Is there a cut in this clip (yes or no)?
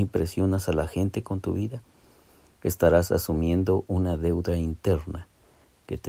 no